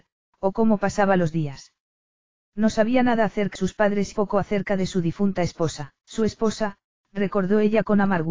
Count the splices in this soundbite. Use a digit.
3